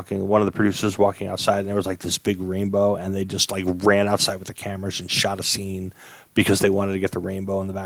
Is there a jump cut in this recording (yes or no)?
no